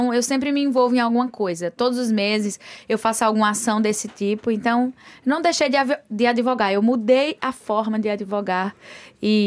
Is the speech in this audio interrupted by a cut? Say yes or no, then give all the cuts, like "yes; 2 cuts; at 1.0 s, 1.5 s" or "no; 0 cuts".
no; 0 cuts